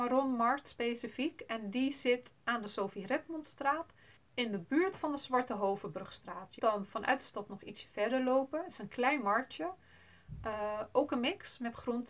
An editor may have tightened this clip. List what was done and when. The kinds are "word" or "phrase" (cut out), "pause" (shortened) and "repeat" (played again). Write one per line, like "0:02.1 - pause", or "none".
0:04.2 - pause
0:06.6 - word